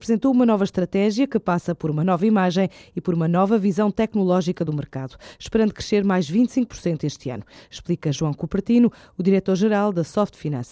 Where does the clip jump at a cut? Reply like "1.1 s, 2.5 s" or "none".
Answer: none